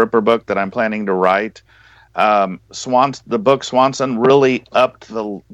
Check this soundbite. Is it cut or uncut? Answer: uncut